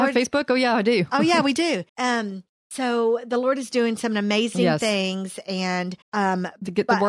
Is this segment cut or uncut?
cut